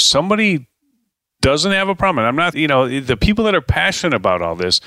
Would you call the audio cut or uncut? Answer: cut